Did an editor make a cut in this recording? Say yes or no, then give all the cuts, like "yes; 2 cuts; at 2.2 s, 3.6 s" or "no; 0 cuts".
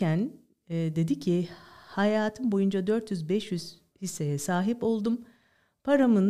no; 0 cuts